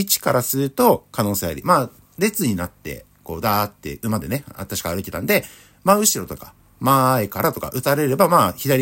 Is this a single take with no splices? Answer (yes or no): yes